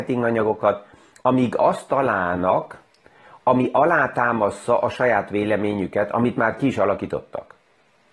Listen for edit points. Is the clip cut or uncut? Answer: uncut